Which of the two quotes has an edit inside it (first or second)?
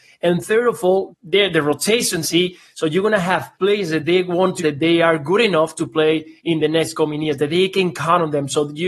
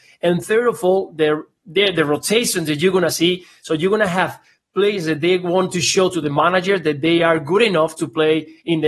first